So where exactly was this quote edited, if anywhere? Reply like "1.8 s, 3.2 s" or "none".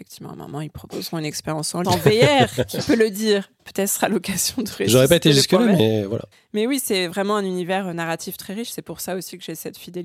1.8 s, 3.6 s, 6.3 s